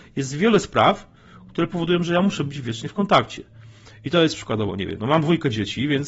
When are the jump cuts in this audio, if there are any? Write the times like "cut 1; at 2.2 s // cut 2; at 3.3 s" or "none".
none